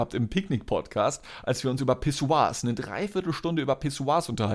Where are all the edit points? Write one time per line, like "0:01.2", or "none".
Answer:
none